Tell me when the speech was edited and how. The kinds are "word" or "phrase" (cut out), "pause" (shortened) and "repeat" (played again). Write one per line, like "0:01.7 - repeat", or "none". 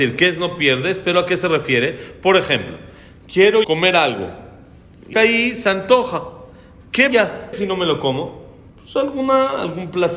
0:03.6 - word
0:05.1 - word
0:07.1 - word
0:07.5 - word
0:08.7 - pause